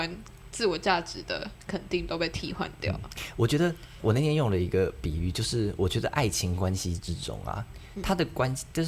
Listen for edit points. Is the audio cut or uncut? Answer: cut